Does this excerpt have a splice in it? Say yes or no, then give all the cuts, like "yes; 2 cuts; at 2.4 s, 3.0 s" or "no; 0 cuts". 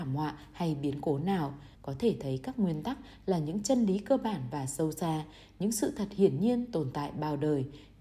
yes; 1 cut; at 1.7 s